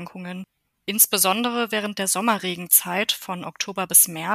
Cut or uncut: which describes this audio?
uncut